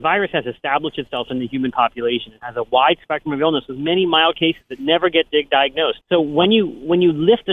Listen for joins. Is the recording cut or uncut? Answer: cut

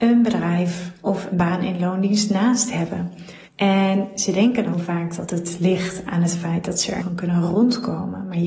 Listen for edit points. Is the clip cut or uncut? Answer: cut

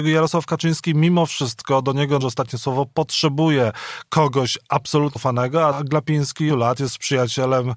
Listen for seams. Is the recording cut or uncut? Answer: cut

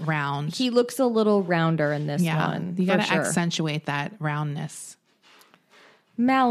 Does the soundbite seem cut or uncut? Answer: uncut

